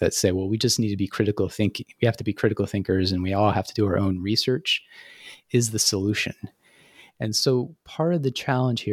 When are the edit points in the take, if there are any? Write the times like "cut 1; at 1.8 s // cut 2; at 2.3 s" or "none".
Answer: none